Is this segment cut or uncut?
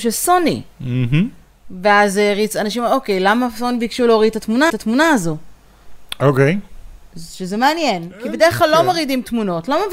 cut